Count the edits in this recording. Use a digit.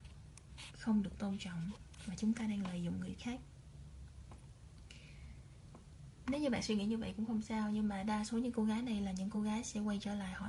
0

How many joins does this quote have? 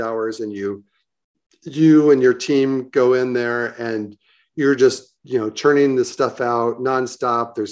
0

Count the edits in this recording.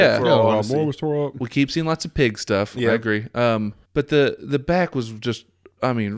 1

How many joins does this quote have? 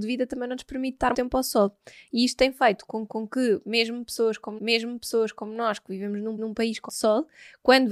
5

